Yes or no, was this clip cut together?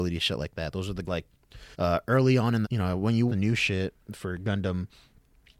yes